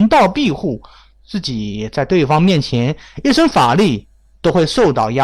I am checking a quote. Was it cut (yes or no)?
no